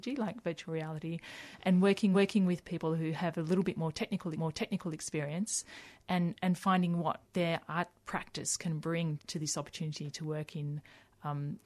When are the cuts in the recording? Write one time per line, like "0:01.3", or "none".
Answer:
0:02.1
0:04.3
0:07.2
0:09.2